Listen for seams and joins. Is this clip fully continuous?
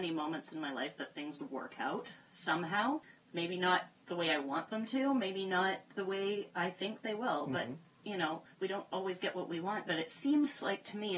no; 2 cuts; at 1.4 s, 8.5 s

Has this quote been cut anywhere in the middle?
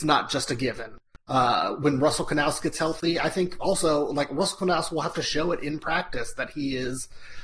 no; 0 cuts

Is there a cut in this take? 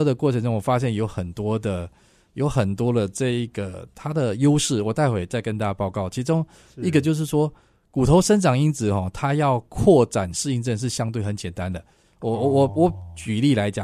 no; 0 cuts

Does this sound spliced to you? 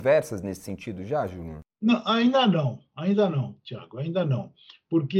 no; 0 cuts

